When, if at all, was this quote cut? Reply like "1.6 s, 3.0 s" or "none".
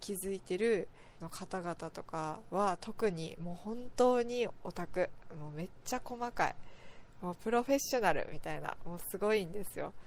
1.2 s